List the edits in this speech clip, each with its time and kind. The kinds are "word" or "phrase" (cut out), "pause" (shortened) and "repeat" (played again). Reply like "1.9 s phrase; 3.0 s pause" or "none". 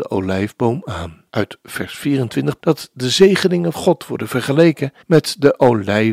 1.3 s pause; 2.6 s word; 3.7 s word; 5.0 s pause